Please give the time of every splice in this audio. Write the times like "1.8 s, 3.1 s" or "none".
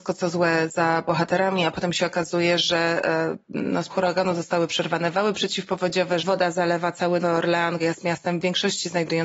3.9 s, 6.2 s, 7.2 s, 7.8 s